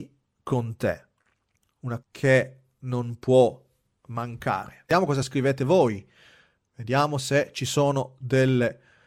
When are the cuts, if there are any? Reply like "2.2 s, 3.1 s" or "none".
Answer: 2.0 s